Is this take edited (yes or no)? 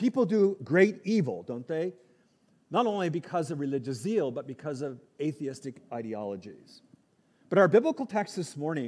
no